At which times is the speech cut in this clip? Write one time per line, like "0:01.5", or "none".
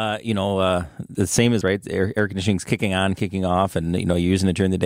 0:01.1
0:01.6